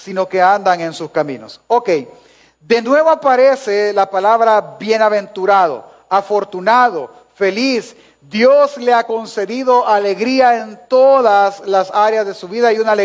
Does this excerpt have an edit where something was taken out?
no; 0 cuts

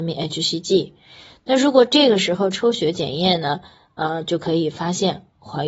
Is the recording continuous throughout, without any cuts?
yes; 0 cuts

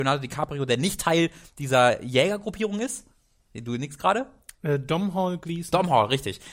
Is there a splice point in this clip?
no; 0 cuts

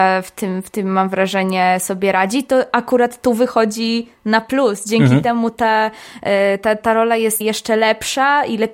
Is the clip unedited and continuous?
no; 1 cut; at 7.4 s

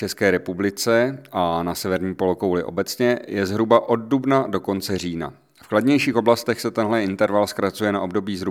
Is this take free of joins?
yes; 0 cuts

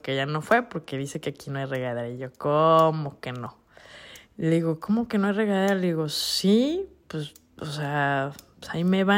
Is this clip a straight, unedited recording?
yes; 0 cuts

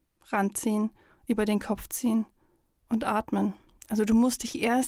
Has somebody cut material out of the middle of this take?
no; 0 cuts

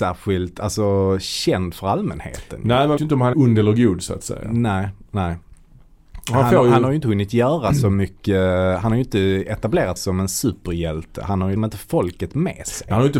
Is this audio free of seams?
no; 4 cuts; at 3.0 s, 3.3 s, 10.0 s, 11.6 s

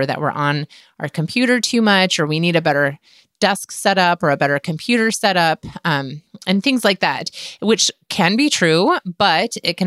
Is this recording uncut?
yes; 0 cuts

